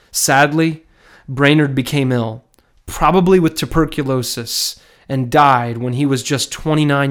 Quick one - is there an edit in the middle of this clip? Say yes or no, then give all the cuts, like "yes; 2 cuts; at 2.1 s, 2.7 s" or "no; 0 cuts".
no; 0 cuts